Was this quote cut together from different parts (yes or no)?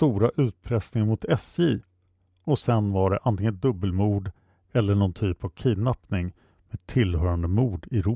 no